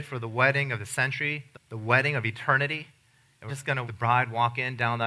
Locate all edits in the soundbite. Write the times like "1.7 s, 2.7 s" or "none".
1.5 s, 3.5 s, 3.9 s